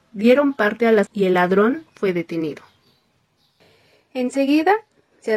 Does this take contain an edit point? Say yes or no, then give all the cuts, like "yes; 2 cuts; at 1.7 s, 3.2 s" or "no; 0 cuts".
yes; 1 cut; at 1.1 s